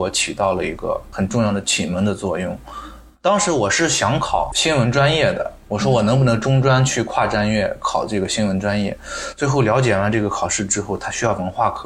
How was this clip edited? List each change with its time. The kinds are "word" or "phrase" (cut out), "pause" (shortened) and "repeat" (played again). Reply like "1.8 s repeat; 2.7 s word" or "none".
none